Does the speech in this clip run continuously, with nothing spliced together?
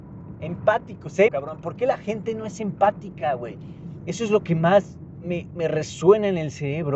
no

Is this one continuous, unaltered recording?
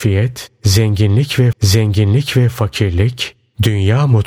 no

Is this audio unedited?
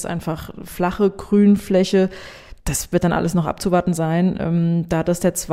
no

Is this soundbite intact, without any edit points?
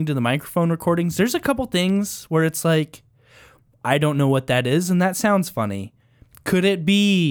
yes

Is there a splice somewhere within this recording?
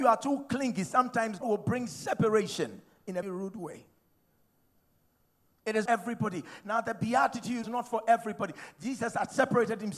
yes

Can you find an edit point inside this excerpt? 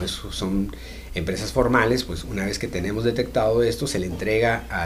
no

